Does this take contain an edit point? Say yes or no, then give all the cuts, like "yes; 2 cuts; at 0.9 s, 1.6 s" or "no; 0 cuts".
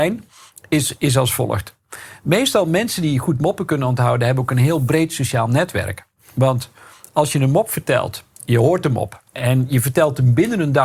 yes; 2 cuts; at 6.2 s, 9.3 s